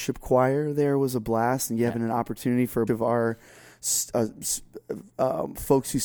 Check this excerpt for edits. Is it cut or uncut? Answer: cut